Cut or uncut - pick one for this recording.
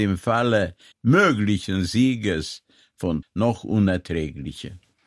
cut